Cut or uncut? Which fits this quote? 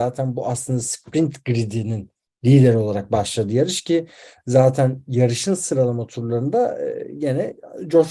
uncut